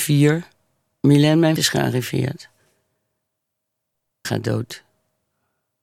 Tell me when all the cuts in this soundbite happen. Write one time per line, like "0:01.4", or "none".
0:01.6
0:04.2